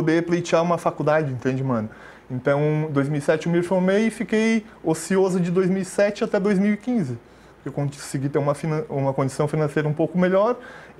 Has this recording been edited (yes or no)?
no